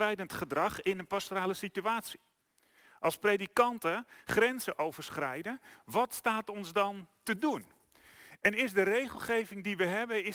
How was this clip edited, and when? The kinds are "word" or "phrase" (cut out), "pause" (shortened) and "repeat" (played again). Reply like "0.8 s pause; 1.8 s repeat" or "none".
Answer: none